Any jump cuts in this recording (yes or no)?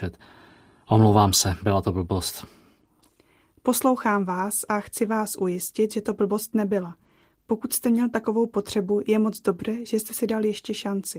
no